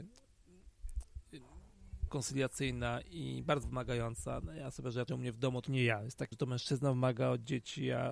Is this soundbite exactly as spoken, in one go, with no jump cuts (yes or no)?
no